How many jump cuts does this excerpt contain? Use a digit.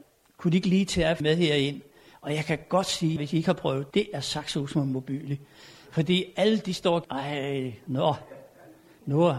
4